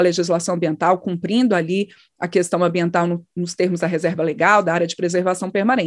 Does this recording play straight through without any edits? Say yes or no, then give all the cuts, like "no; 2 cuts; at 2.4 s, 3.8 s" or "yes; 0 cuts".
yes; 0 cuts